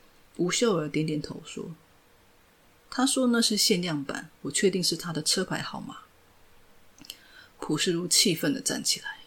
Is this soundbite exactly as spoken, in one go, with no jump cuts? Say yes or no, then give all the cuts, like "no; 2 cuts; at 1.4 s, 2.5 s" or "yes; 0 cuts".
yes; 0 cuts